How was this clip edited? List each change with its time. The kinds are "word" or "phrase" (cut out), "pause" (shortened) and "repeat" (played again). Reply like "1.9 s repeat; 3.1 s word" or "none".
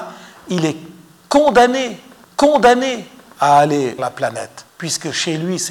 2.2 s repeat; 4.0 s word; 4.7 s pause